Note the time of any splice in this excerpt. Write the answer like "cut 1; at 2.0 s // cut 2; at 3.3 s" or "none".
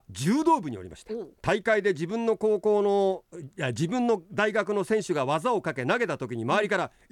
cut 1; at 1.4 s